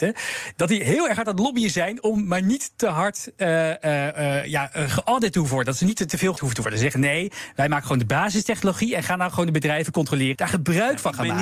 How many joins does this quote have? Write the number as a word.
two